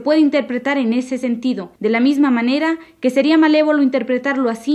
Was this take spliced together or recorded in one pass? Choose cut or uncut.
cut